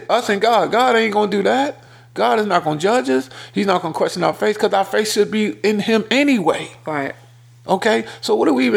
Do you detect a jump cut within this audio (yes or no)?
no